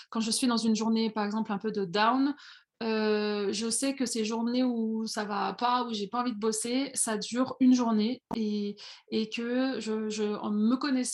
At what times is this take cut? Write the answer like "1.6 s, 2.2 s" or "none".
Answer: none